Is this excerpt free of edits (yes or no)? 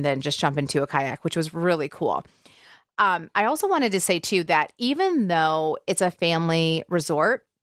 yes